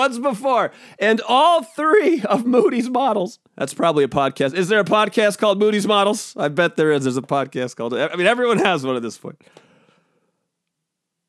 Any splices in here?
yes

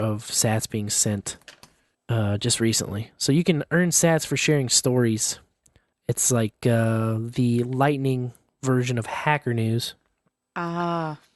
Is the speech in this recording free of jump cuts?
yes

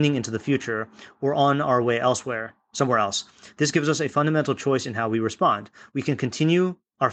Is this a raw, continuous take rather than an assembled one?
yes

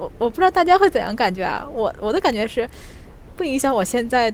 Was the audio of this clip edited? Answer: yes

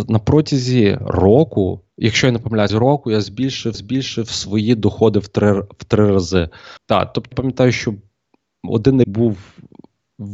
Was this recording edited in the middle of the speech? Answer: yes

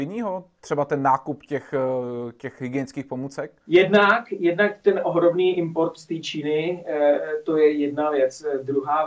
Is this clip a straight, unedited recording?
no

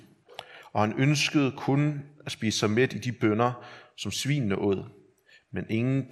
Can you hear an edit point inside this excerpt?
no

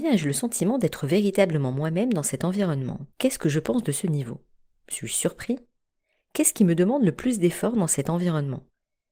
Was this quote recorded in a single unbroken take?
no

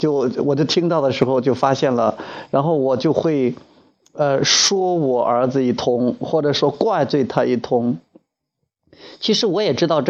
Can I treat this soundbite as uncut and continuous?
yes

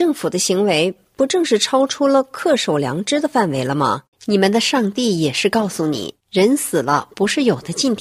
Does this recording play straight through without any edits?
no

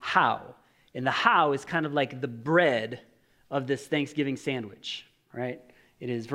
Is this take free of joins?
yes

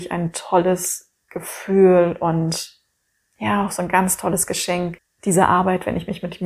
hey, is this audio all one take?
yes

